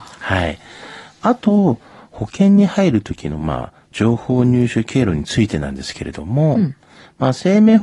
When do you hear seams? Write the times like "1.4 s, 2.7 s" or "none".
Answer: none